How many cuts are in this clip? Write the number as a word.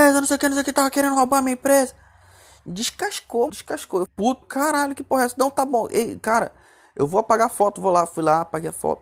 three